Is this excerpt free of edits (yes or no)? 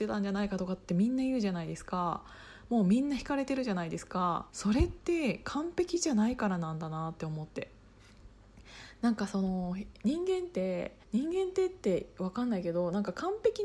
no